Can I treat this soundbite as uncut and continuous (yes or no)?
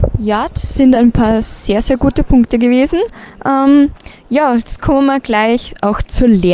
yes